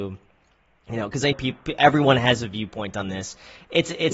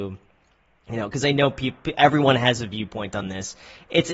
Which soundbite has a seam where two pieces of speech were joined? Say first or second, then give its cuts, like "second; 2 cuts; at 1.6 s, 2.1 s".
first; 1 cut; at 1.3 s